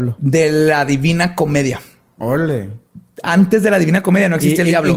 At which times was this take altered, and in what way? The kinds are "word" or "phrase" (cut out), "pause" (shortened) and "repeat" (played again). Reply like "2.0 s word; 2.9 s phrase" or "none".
none

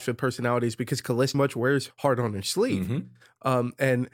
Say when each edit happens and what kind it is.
1.3 s word; 1.9 s word

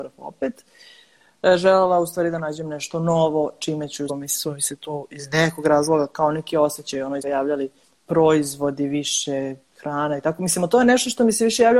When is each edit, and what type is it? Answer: 4.1 s phrase; 7.2 s word; 7.8 s pause

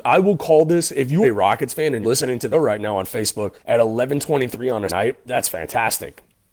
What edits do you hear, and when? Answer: 1.2 s word; 2.0 s word; 2.5 s word; 3.6 s pause; 4.9 s word

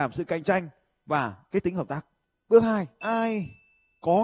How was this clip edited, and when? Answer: 1.5 s word; 3.0 s word

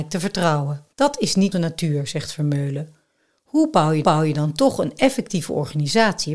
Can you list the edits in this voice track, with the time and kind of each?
0.9 s pause; 1.5 s word; 4.0 s repeat

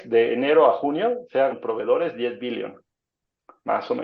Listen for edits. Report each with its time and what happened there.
1.5 s word

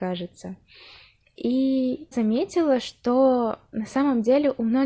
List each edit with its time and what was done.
2.1 s word

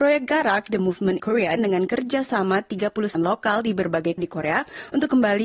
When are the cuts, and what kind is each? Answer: 1.2 s word; 1.6 s word; 3.1 s word; 4.2 s word

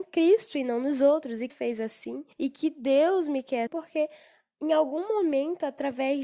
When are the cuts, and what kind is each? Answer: 1.5 s phrase; 2.3 s pause; 3.7 s word

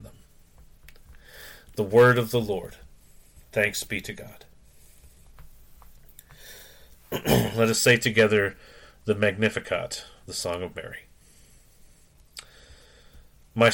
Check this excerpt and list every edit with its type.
none

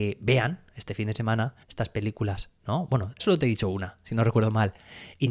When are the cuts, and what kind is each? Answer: 1.6 s pause; 3.2 s word

